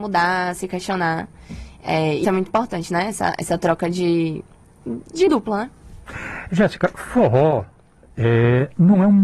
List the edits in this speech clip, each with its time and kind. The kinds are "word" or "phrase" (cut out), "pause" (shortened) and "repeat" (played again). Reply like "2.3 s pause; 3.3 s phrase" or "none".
2.2 s word; 5.3 s word